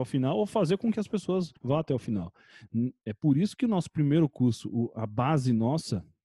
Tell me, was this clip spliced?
yes; 1 cut; at 1.6 s

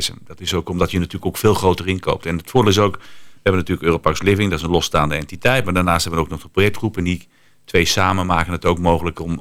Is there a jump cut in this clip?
no; 0 cuts

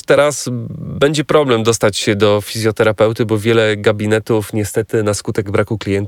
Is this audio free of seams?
yes; 0 cuts

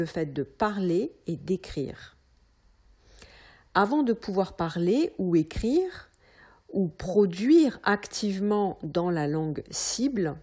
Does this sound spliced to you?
no; 0 cuts

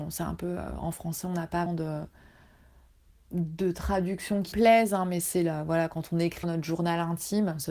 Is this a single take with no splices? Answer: no; 3 cuts; at 1.7 s, 4.5 s, 6.4 s

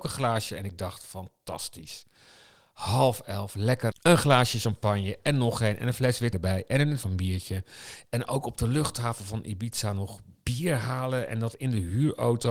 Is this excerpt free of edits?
no; 3 cuts; at 3.9 s, 6.3 s, 7.0 s

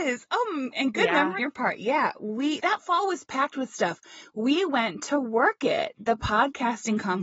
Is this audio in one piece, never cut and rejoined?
no; 2 cuts; at 1.4 s, 2.6 s

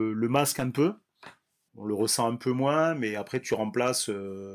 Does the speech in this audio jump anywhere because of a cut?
yes; 1 cut; at 1.7 s

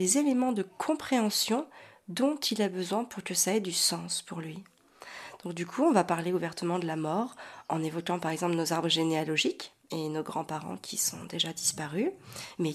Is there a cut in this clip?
no; 0 cuts

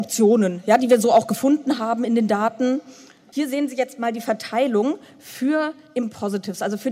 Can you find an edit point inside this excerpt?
no; 0 cuts

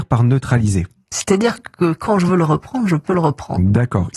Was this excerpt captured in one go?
yes; 0 cuts

